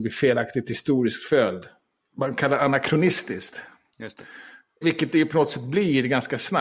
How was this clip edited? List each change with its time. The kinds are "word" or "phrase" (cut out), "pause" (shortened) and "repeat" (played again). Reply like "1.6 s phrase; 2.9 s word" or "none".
none